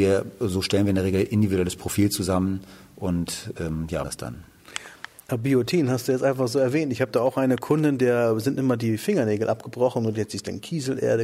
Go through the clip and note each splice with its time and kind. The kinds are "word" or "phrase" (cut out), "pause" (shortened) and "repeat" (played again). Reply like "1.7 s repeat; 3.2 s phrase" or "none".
4.0 s word